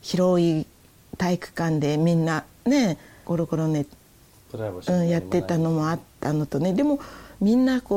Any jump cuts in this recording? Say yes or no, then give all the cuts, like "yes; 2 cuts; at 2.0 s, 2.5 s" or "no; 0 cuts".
no; 0 cuts